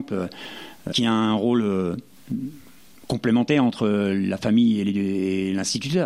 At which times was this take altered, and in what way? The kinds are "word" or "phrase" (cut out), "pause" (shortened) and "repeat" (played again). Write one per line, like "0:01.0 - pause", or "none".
0:00.9 - word